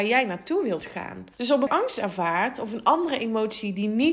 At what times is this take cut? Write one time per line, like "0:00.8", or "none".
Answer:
0:01.3
0:01.7

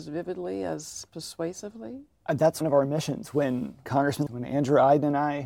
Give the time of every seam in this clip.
0:02.6
0:03.9
0:04.3

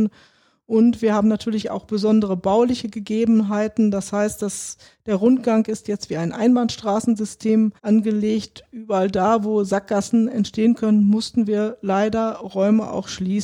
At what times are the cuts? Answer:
0:07.8

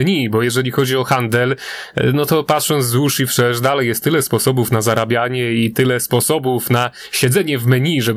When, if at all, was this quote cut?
none

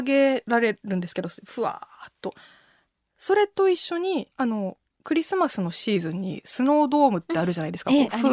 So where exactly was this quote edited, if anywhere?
0:04.3

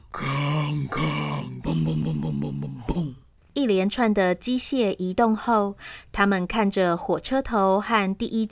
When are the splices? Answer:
0:01.6

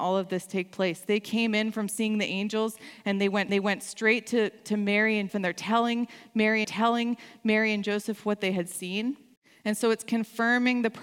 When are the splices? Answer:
0:03.5
0:05.3
0:06.6
0:09.4

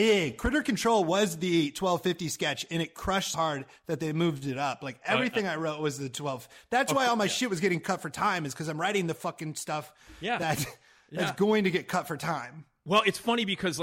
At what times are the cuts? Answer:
0:03.3

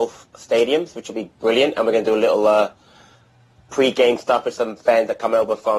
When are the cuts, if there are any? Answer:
none

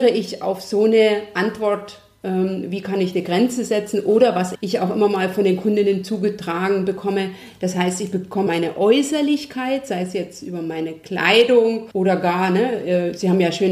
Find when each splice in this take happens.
0:04.5
0:08.5
0:11.9

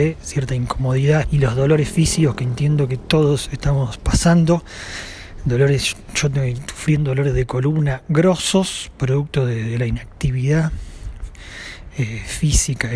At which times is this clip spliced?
0:01.2

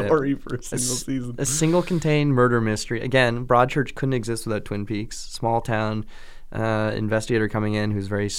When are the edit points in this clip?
none

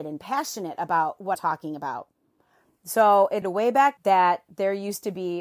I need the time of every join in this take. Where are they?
0:01.3
0:03.4
0:04.0

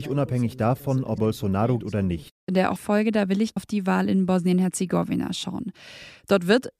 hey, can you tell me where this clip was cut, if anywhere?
0:01.2
0:01.8
0:02.8
0:03.6

